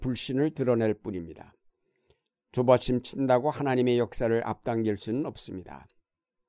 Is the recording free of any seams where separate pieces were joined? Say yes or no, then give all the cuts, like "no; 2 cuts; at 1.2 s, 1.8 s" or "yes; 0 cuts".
yes; 0 cuts